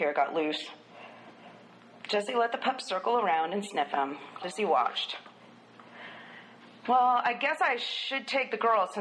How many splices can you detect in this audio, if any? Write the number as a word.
one